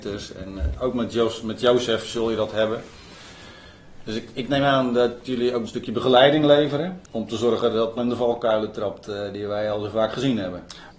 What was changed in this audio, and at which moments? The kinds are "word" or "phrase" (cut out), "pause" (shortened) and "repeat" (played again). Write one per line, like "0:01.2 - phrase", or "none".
0:05.7 - phrase
0:07.1 - pause
0:08.0 - phrase